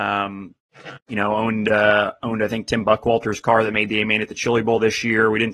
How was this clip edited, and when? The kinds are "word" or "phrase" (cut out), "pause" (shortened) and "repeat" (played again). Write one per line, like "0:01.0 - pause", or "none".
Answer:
0:01.0 - pause